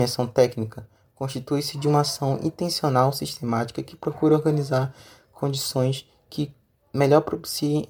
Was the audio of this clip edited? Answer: no; 0 cuts

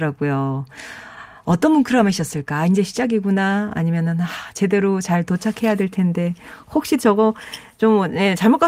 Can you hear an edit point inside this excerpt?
no; 0 cuts

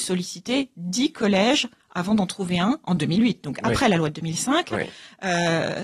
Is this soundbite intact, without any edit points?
yes; 0 cuts

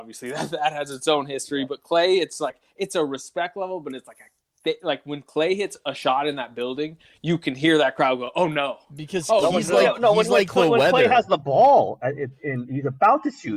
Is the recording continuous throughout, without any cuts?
yes; 0 cuts

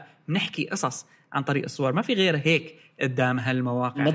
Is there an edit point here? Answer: no; 0 cuts

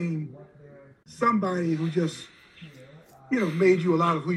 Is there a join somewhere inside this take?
no; 0 cuts

